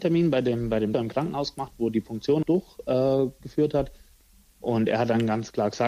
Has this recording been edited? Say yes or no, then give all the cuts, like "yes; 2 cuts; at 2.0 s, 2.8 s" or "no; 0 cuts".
yes; 2 cuts; at 0.9 s, 2.4 s